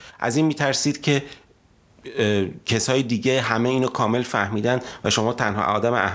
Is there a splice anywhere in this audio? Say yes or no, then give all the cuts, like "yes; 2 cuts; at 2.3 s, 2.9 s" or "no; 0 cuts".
no; 0 cuts